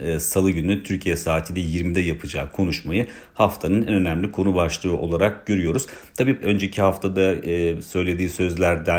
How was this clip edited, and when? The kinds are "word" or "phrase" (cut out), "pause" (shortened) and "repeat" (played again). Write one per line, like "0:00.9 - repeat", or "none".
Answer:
0:06.4 - phrase